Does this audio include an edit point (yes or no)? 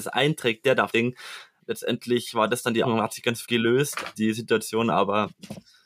yes